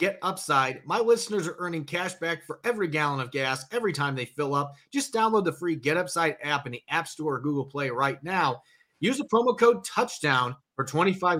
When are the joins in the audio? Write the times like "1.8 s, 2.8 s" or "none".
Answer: none